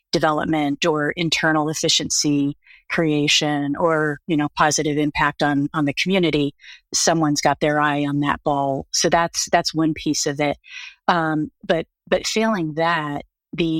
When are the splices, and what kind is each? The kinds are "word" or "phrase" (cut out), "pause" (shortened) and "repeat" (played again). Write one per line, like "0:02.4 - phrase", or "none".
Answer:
none